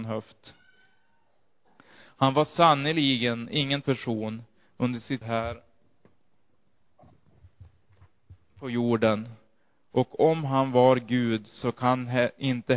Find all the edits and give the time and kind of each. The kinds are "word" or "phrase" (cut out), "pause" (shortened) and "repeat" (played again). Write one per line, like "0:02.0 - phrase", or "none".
0:03.8 - word
0:05.2 - word